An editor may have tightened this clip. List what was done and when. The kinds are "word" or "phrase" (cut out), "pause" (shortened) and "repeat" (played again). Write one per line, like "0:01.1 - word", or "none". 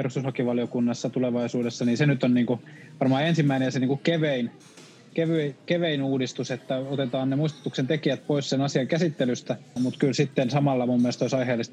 0:09.8 - word